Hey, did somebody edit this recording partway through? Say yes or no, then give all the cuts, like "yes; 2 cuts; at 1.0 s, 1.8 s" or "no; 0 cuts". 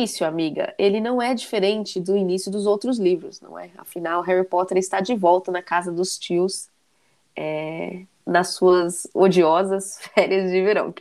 no; 0 cuts